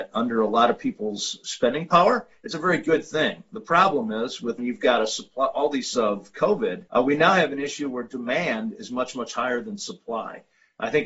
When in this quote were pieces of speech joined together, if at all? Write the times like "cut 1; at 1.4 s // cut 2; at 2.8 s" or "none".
cut 1; at 4.6 s // cut 2; at 5.9 s // cut 3; at 6.9 s